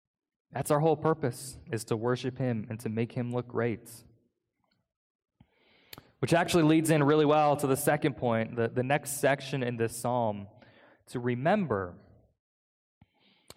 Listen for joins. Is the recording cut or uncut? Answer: uncut